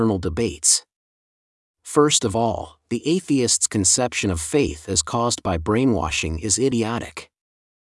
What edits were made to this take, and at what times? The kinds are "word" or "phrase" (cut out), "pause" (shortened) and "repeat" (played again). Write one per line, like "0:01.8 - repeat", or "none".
none